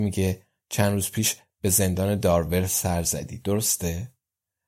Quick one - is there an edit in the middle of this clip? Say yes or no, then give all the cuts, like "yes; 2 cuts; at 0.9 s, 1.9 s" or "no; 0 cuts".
no; 0 cuts